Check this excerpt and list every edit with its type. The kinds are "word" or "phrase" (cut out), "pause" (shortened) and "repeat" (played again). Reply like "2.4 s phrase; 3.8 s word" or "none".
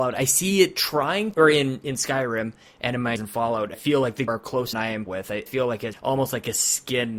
1.3 s word; 3.2 s word; 3.7 s word; 4.3 s word; 4.7 s word; 5.1 s word; 5.5 s word; 5.9 s word